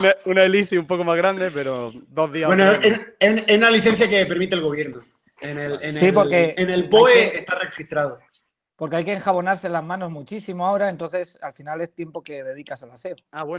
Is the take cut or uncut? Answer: uncut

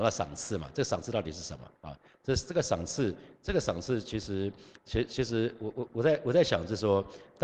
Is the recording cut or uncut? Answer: cut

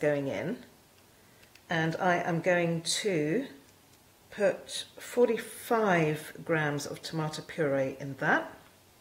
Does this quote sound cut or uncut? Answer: uncut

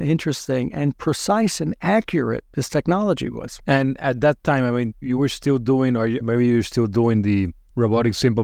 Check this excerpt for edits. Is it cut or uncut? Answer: cut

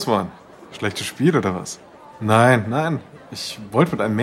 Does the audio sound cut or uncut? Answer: uncut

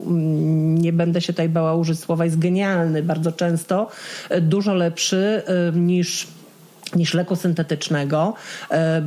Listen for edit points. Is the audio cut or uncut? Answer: uncut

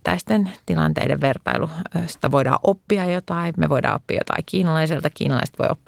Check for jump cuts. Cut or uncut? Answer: uncut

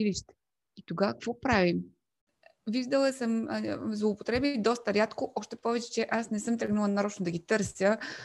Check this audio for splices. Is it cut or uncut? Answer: uncut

